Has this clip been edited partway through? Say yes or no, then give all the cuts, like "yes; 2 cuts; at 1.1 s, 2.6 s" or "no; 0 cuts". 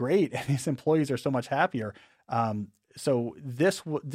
no; 0 cuts